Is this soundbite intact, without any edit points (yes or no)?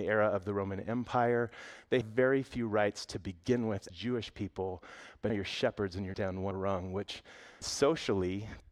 no